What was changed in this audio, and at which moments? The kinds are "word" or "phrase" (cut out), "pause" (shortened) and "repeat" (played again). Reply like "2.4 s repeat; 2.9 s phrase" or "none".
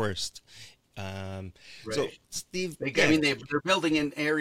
2.2 s pause